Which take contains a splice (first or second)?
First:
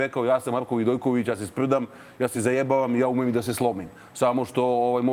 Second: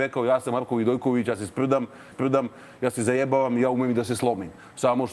second